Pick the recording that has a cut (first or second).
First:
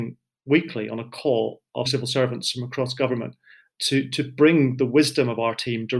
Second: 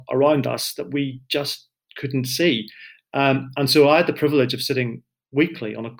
first